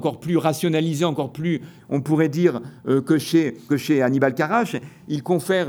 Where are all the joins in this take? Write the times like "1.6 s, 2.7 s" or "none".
1.8 s, 3.7 s